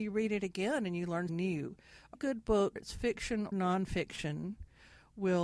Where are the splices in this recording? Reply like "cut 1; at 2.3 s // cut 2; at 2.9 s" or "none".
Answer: cut 1; at 1.3 s // cut 2; at 2.1 s // cut 3; at 2.8 s // cut 4; at 3.5 s